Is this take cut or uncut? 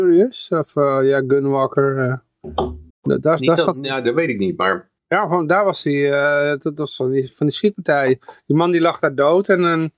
cut